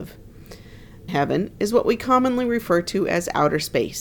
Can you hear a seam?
yes; 1 cut; at 1.1 s

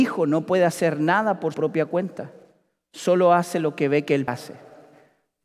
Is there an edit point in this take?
yes; 2 cuts; at 1.5 s, 4.3 s

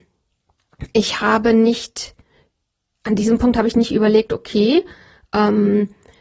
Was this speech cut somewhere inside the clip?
no; 0 cuts

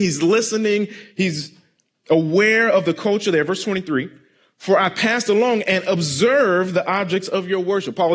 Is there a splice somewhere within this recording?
no; 0 cuts

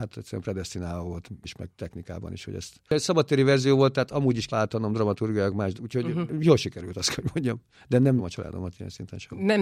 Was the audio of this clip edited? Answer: yes; 4 cuts; at 1.4 s, 4.5 s, 5.7 s, 8.2 s

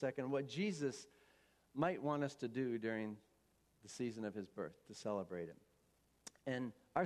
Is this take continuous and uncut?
yes; 0 cuts

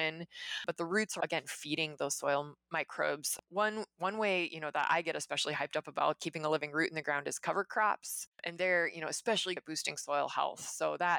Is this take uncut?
no; 3 cuts; at 1.2 s, 8.3 s, 9.6 s

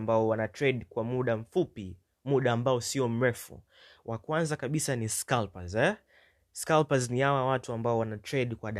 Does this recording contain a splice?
no; 0 cuts

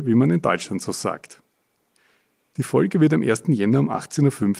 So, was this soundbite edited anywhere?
no; 0 cuts

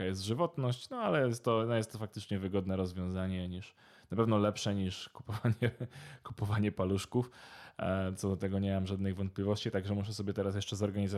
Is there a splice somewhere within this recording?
no; 0 cuts

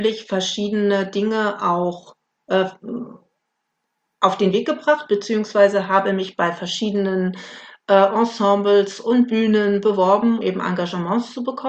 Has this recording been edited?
yes; 1 cut; at 10.4 s

